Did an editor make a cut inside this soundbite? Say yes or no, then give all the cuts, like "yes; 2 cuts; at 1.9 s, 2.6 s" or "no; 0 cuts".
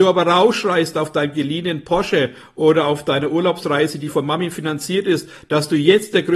no; 0 cuts